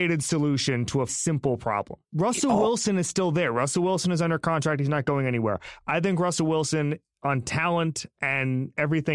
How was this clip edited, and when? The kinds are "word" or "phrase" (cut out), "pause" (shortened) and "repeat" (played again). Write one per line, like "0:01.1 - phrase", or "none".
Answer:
0:01.1 - word
0:02.0 - pause